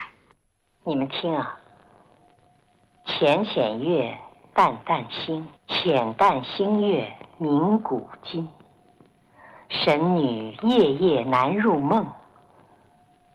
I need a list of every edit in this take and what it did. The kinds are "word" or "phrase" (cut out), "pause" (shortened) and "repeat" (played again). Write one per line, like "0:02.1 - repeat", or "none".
0:05.6 - pause

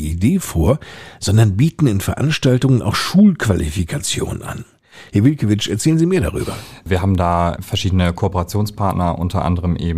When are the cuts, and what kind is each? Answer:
none

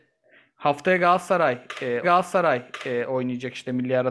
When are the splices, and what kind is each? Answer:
0:02.0 - repeat

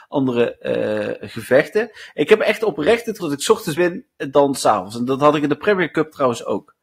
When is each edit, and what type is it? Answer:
0:03.2 - word
0:03.8 - word

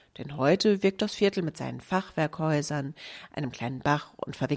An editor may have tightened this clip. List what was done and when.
none

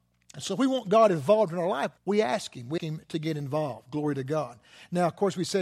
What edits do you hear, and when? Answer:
0:02.0 - pause
0:02.8 - word

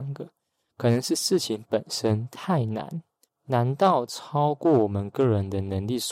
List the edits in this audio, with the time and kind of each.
0:03.3 - pause

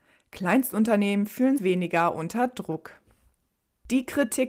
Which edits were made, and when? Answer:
0:01.6 - word

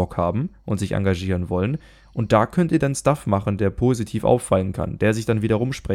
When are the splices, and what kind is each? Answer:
none

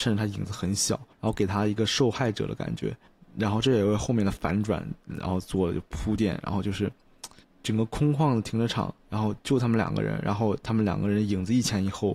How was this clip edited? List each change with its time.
0:01.1 - pause
0:03.1 - pause
0:07.4 - pause
0:09.0 - pause

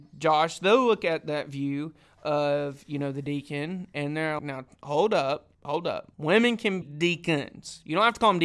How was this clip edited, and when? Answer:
0:04.4 - word
0:05.5 - pause
0:06.1 - pause
0:06.8 - word

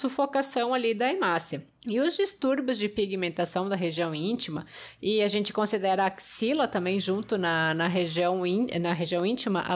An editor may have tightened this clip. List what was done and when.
0:01.8 - pause

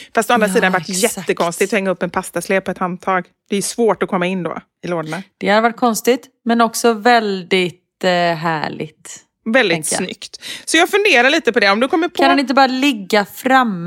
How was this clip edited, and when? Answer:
none

